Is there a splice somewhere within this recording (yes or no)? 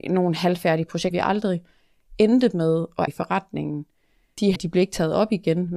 yes